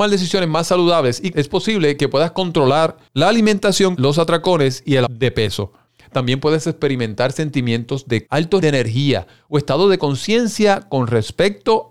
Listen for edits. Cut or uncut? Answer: cut